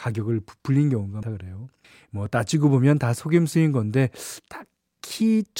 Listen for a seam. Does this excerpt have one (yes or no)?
yes